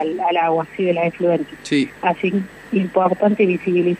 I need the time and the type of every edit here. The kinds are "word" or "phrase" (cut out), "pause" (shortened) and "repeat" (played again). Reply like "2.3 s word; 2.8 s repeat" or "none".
2.3 s word

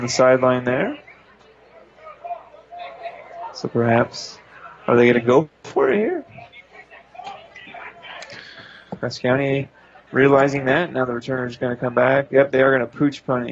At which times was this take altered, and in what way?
5.6 s pause

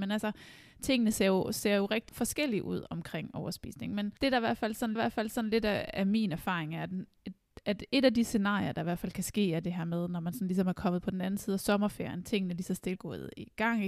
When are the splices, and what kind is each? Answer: 2.1 s word; 4.2 s pause; 5.0 s repeat; 13.0 s word

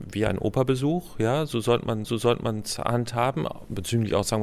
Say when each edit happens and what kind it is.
2.0 s repeat

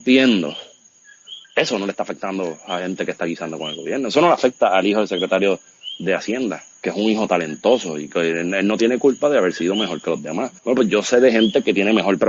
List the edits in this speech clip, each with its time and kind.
1.4 s pause; 10.6 s pause

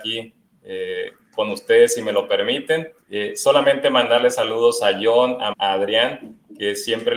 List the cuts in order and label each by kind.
3.0 s pause; 5.5 s word

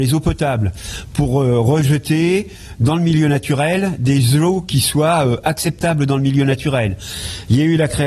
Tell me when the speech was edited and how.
none

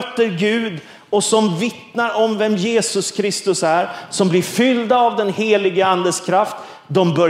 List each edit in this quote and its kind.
none

